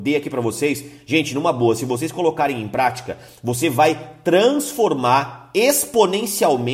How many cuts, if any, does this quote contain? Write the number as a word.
zero